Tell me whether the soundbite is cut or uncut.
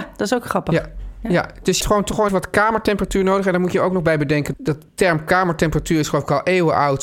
cut